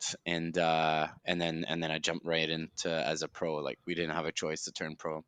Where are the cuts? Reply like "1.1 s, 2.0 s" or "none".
1.2 s